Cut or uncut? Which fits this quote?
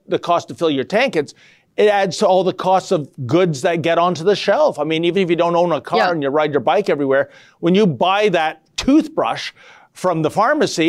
uncut